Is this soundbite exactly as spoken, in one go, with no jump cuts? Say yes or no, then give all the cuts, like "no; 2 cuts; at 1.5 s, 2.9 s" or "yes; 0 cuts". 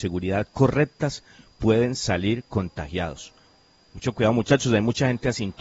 yes; 0 cuts